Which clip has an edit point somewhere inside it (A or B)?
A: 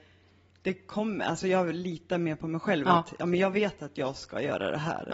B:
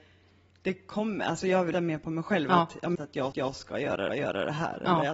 B